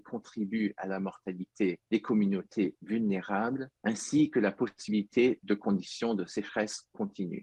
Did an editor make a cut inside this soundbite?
no; 0 cuts

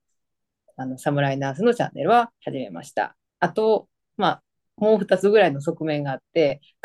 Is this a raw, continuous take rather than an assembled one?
no; 2 cuts; at 2.4 s, 3.3 s

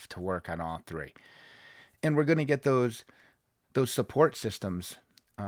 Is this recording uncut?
yes; 0 cuts

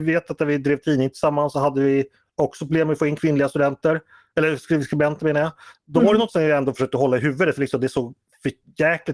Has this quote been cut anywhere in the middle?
no; 0 cuts

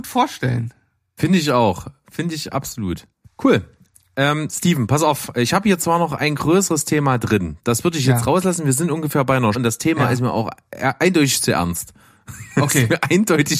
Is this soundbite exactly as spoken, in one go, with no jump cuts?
no; 2 cuts; at 3.3 s, 9.5 s

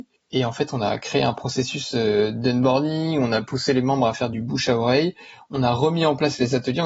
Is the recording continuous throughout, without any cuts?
no; 1 cut; at 4.3 s

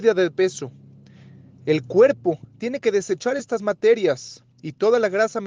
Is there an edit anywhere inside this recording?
no; 0 cuts

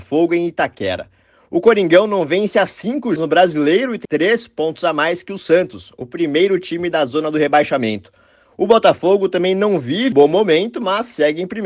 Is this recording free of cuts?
no; 3 cuts; at 3.2 s, 4.0 s, 10.1 s

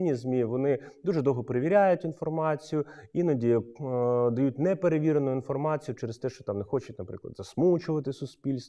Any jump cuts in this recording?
no; 0 cuts

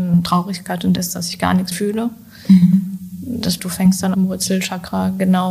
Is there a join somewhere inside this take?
yes; 4 cuts; at 1.0 s, 1.7 s, 3.6 s, 4.1 s

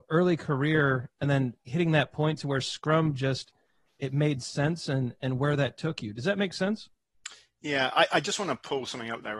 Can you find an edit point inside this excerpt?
no; 0 cuts

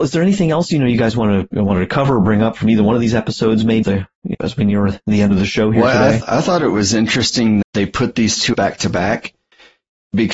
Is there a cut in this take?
yes; 4 cuts; at 3.8 s, 4.3 s, 7.6 s, 8.5 s

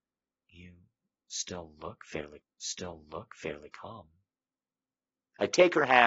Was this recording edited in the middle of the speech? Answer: yes; 1 cut; at 2.4 s

